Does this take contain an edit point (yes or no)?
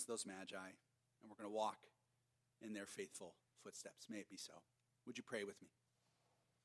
no